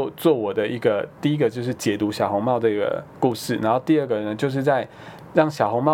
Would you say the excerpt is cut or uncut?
uncut